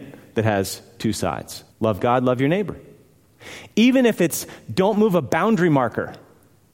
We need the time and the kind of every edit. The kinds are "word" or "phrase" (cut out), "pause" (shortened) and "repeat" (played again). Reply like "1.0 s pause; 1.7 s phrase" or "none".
1.7 s pause